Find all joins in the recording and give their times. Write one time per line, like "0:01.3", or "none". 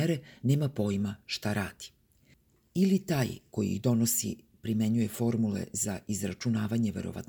none